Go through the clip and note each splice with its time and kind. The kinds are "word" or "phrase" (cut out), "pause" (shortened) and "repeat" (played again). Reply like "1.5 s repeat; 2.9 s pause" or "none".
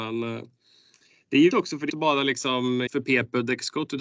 1.5 s word; 1.9 s word; 2.9 s word